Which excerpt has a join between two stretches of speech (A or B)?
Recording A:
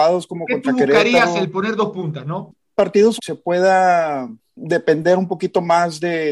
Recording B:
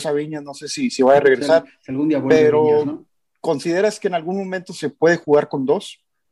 A